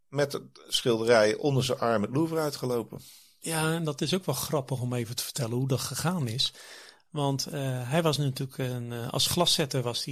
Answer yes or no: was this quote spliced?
no